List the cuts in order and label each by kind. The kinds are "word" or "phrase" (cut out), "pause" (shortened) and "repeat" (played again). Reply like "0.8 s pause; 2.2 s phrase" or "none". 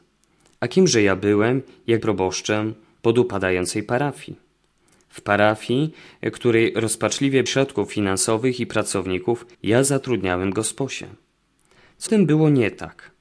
2.0 s word; 7.5 s word; 9.5 s pause; 12.1 s word